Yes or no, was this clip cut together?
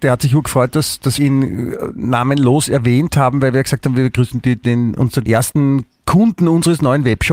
yes